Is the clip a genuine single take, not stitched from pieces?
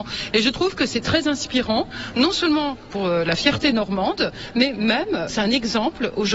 yes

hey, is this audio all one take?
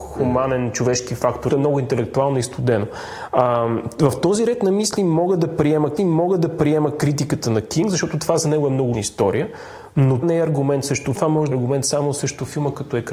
no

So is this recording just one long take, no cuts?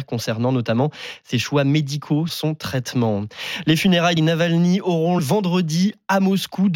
no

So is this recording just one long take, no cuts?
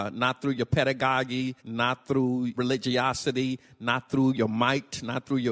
no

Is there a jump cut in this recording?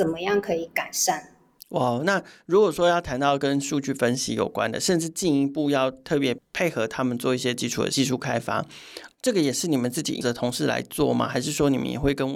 yes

